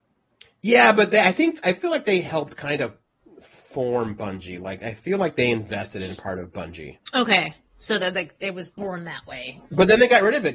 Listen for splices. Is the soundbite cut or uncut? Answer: cut